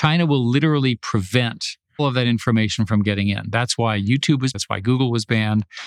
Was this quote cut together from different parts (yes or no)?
yes